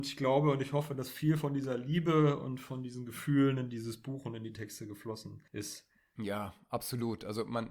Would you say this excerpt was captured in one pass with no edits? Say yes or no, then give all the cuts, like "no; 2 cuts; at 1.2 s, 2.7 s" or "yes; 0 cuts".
no; 1 cut; at 5.5 s